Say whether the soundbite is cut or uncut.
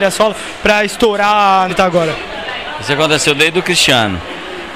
cut